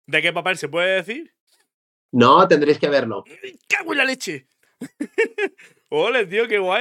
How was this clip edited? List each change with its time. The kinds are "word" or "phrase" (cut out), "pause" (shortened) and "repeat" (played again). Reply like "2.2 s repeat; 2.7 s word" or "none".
none